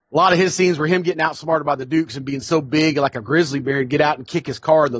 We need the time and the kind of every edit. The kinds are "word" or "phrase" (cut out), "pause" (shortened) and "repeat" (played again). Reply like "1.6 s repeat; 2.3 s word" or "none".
none